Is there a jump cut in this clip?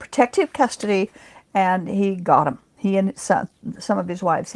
no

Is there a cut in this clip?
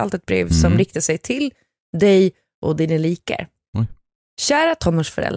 no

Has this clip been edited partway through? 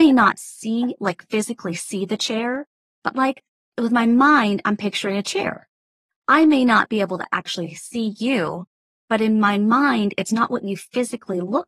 no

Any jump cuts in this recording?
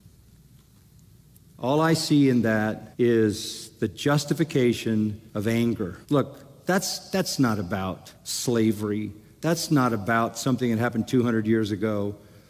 yes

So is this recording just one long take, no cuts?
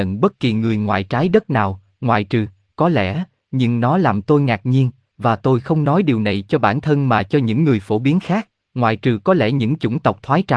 yes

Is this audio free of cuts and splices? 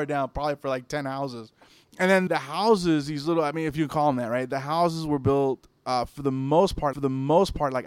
no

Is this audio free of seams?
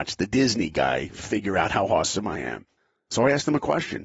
yes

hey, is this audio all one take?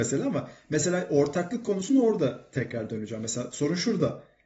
yes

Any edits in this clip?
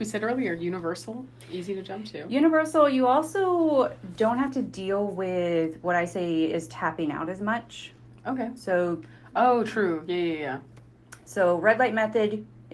no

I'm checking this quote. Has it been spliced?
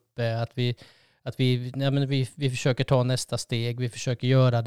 no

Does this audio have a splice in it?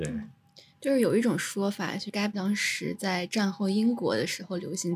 yes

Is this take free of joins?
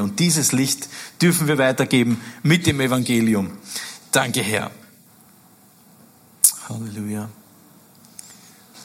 yes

